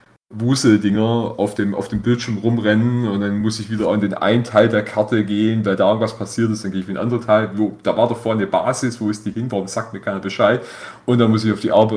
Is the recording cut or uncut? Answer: uncut